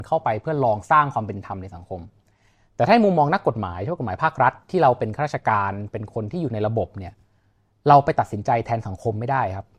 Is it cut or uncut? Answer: uncut